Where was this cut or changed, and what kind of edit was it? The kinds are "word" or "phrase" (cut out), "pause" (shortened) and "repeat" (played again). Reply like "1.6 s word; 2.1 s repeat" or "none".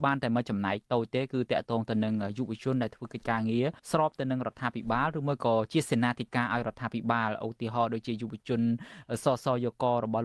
3.8 s pause